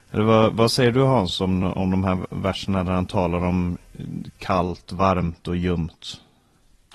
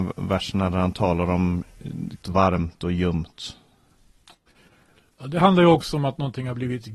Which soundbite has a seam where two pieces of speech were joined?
second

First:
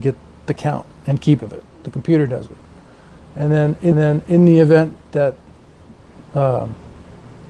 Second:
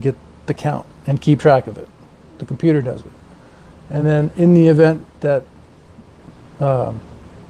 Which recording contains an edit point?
first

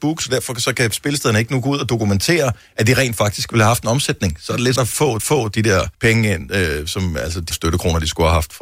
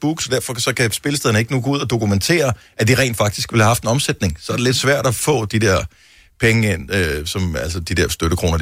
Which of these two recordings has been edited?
first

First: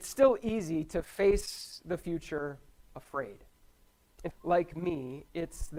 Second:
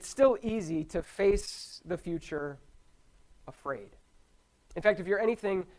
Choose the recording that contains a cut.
first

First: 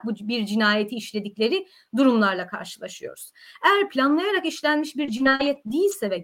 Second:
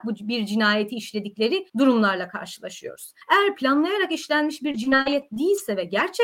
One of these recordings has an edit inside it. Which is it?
second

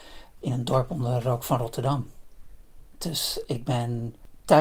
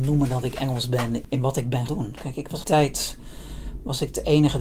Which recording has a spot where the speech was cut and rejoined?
second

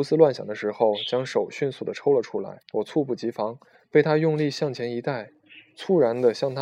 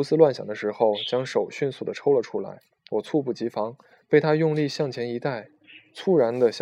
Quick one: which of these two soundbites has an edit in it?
first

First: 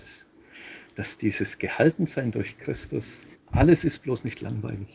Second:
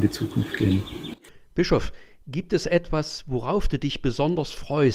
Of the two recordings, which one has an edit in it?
first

